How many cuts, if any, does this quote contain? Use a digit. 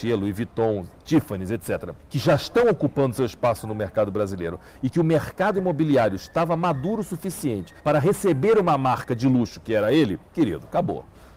3